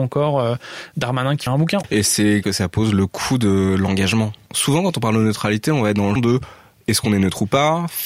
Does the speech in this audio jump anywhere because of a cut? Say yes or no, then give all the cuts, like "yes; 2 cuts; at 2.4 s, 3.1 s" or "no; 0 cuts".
yes; 3 cuts; at 1.5 s, 2.4 s, 6.2 s